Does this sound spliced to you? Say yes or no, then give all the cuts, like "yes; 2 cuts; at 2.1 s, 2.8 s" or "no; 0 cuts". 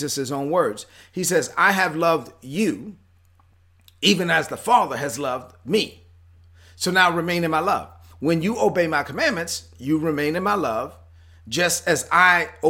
no; 0 cuts